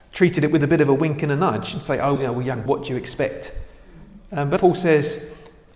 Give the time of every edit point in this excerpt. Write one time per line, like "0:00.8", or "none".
0:02.2
0:02.7
0:04.6